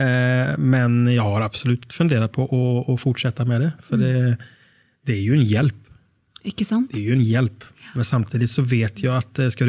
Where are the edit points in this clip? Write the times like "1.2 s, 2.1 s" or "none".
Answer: none